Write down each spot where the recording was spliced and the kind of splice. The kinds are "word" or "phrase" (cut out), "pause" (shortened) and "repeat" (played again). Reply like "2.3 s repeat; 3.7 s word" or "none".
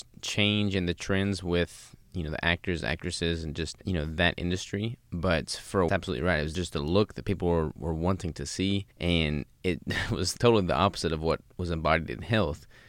3.8 s pause; 5.9 s phrase; 6.5 s phrase; 8.9 s pause; 10.4 s word